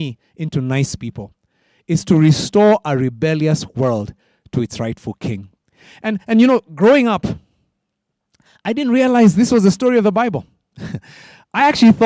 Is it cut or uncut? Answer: uncut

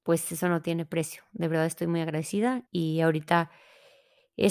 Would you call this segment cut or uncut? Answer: cut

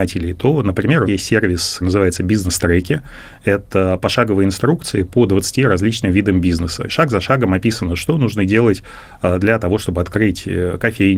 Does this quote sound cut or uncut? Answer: cut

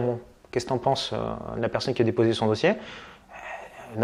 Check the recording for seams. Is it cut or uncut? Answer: uncut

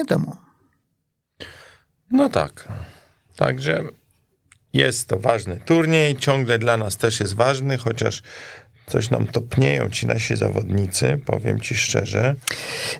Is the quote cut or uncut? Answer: uncut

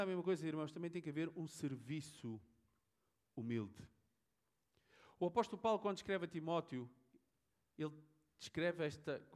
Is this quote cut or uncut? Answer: uncut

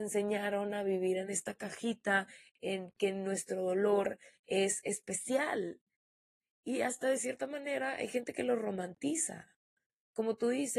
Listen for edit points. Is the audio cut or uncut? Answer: uncut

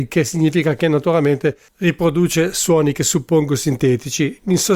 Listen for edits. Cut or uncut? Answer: uncut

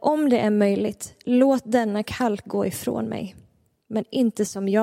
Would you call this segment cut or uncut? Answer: uncut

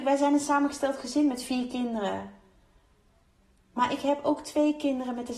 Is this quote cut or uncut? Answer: uncut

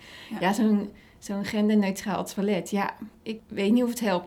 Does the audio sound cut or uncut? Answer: uncut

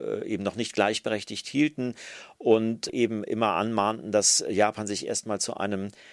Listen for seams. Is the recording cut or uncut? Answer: uncut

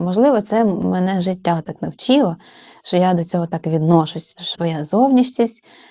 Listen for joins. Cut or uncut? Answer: cut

